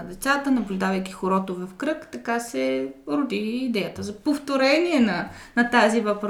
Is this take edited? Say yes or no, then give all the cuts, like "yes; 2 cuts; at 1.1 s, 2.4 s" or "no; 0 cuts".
no; 0 cuts